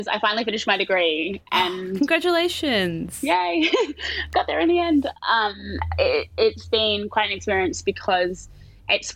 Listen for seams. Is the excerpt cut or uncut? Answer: uncut